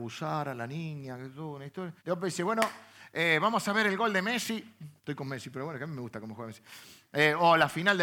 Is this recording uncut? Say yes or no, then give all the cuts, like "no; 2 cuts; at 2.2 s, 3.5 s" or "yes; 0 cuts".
no; 2 cuts; at 2.0 s, 5.0 s